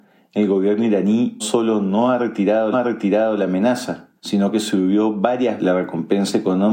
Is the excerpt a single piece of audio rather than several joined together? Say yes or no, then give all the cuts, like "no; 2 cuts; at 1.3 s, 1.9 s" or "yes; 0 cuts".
no; 4 cuts; at 1.4 s, 2.7 s, 4.2 s, 5.6 s